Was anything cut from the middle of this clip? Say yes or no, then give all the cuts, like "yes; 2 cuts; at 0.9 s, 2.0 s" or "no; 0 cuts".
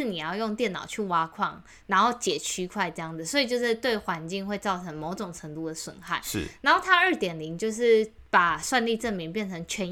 no; 0 cuts